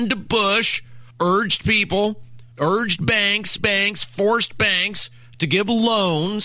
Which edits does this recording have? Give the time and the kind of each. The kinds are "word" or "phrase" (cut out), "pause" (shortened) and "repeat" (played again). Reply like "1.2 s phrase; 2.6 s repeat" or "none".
1.1 s pause; 2.5 s pause; 3.6 s word